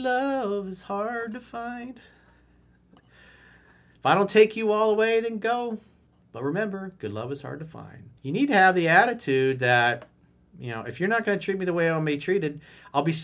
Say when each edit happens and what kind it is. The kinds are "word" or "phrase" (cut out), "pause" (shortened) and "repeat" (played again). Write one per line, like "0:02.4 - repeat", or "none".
0:06.1 - pause
0:08.2 - pause